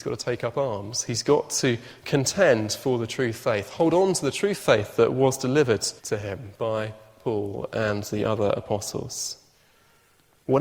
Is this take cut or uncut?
cut